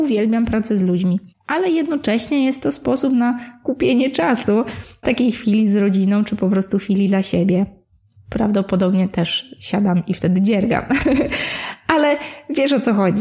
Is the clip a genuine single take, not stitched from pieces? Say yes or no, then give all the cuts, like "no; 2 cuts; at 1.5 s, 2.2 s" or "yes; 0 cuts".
no; 1 cut; at 5.0 s